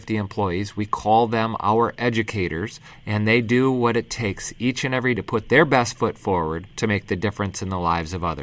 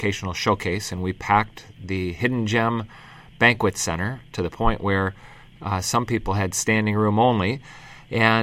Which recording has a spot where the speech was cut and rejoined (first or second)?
first